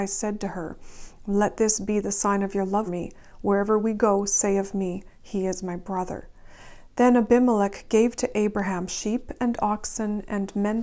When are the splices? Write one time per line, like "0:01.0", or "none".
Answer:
0:02.9